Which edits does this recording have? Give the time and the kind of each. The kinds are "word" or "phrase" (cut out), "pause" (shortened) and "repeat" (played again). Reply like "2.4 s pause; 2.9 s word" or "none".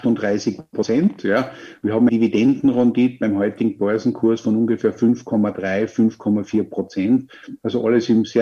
2.1 s word